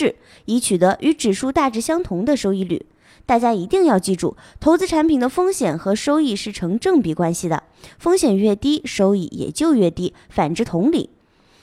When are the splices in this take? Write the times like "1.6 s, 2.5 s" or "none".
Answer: none